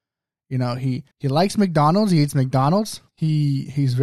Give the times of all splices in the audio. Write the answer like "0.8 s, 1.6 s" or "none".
1.1 s, 3.1 s